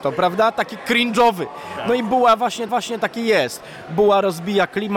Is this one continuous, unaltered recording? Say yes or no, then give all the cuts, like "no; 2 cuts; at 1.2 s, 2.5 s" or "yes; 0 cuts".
no; 1 cut; at 2.7 s